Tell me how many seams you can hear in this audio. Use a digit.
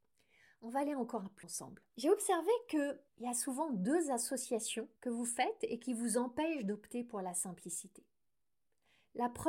4